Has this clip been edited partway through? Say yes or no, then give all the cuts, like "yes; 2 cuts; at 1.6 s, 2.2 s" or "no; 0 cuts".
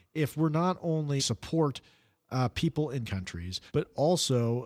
yes; 3 cuts; at 1.2 s, 3.0 s, 3.7 s